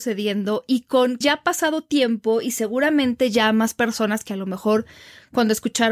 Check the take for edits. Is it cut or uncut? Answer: cut